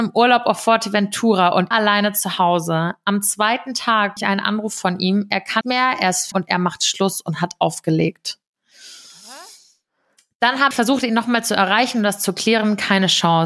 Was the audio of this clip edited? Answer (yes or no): yes